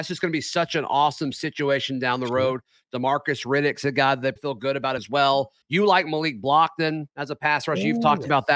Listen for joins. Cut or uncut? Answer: cut